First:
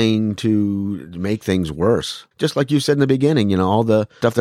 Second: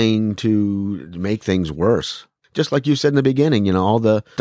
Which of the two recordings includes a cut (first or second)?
first